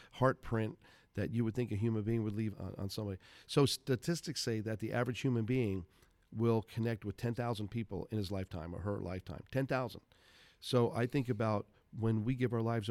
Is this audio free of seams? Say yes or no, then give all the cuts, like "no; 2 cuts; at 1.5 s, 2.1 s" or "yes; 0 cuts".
no; 1 cut; at 2.5 s